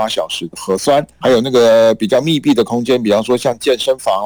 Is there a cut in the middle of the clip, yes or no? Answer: yes